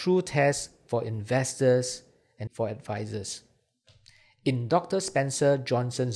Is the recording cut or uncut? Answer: cut